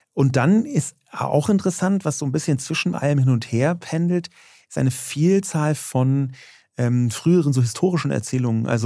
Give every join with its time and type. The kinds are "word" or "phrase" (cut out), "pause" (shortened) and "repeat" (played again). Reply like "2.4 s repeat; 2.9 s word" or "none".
none